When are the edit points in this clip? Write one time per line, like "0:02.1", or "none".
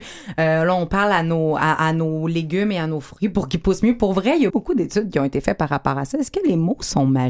0:04.5